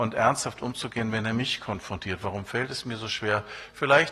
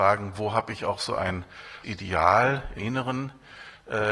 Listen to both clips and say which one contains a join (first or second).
second